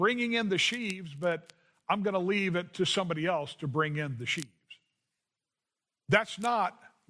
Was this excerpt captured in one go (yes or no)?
yes